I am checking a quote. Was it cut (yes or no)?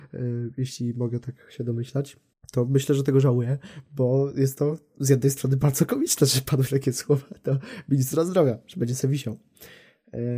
yes